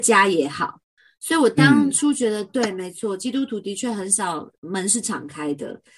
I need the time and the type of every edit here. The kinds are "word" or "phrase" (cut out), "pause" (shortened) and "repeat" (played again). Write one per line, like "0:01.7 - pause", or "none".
0:04.6 - pause